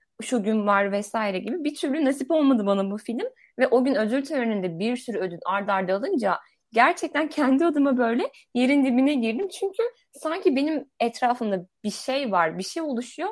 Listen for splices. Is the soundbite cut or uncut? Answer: uncut